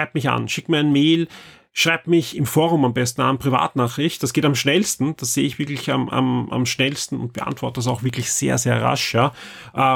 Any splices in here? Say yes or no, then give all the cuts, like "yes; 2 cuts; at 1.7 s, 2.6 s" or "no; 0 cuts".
no; 0 cuts